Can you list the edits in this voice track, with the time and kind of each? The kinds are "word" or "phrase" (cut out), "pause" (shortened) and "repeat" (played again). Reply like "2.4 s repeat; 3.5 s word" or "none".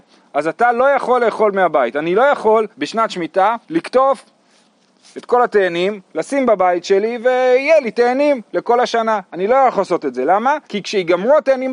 2.7 s pause; 3.6 s pause; 10.6 s pause